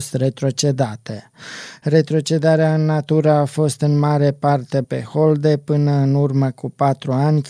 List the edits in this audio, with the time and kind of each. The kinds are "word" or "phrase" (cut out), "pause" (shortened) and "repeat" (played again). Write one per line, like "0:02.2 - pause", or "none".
0:04.8 - word